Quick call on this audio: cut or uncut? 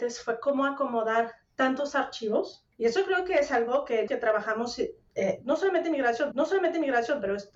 cut